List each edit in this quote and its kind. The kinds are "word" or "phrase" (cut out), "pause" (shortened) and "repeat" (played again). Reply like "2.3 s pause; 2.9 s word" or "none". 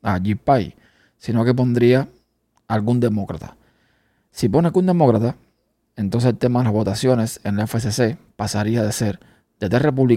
none